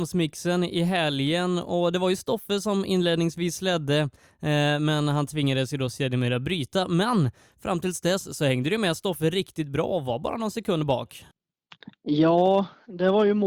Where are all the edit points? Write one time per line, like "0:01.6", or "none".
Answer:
none

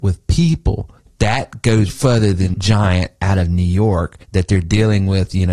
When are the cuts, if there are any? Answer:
0:01.0
0:01.9
0:02.5
0:04.2

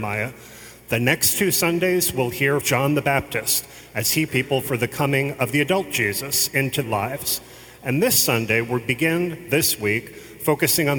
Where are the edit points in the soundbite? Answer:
0:02.6
0:04.3
0:06.8

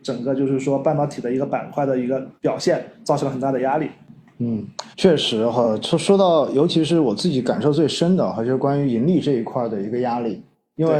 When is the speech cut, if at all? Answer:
0:02.4
0:04.9

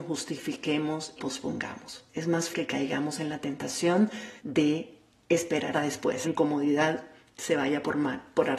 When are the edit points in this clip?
0:01.2
0:02.1
0:02.5
0:04.4
0:05.7
0:06.2

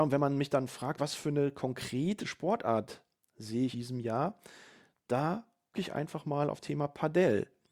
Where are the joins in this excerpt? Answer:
0:01.0
0:02.2
0:03.7
0:05.7
0:06.6

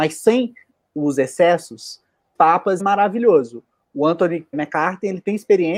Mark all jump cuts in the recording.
0:02.4
0:02.8
0:04.5

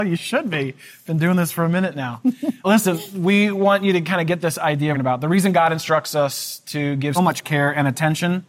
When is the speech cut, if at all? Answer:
0:02.6
0:04.9
0:07.2

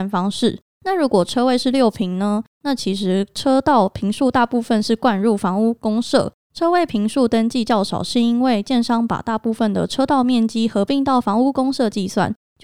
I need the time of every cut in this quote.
none

